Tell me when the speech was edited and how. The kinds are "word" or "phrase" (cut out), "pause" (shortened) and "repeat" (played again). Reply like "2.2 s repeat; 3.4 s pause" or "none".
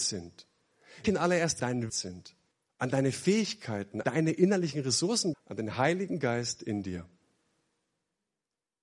1.0 s word; 1.6 s phrase; 1.9 s phrase; 2.5 s pause; 4.0 s word; 5.3 s phrase